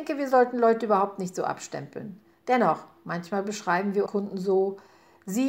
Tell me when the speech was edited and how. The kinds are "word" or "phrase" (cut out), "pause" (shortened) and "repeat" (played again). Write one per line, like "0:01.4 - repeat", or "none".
0:04.1 - word

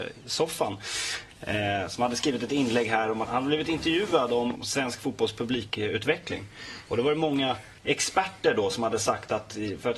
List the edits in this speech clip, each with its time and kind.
0:03.3 - word
0:04.6 - word
0:07.8 - pause

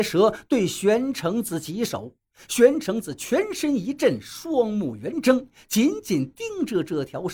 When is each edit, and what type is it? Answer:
none

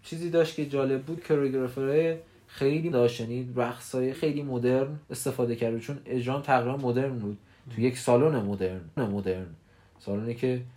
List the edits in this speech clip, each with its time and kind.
0:01.2 - word
0:02.9 - word
0:04.1 - word
0:05.0 - pause
0:09.0 - repeat

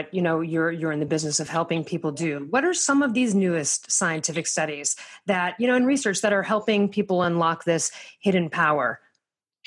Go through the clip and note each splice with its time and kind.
none

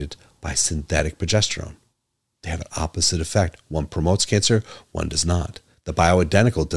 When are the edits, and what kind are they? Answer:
none

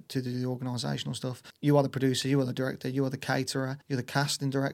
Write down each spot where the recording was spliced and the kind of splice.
0:03.8 - pause

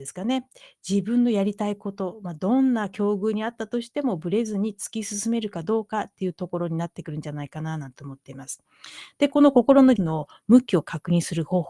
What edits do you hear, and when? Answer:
0:10.0 - word

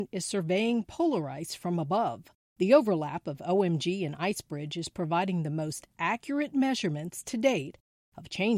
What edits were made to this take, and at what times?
0:02.4 - pause

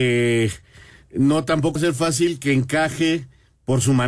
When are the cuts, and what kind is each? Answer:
0:01.8 - word

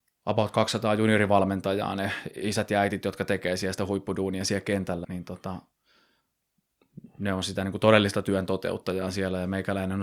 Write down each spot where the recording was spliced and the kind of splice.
0:05.0 - word

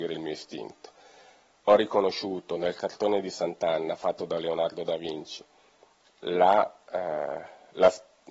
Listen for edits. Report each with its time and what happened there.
none

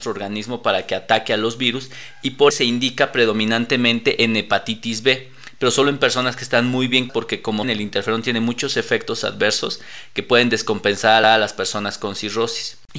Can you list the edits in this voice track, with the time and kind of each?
0:02.5 - word
0:07.1 - word
0:07.6 - word
0:11.2 - repeat

